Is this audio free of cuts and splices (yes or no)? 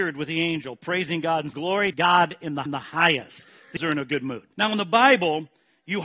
no